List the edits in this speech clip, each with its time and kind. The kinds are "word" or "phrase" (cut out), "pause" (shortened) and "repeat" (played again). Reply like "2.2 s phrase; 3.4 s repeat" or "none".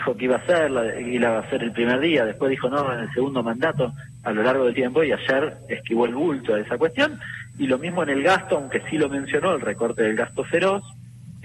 4.7 s word